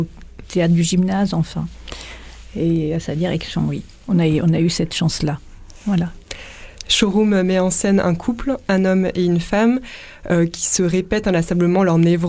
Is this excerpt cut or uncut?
uncut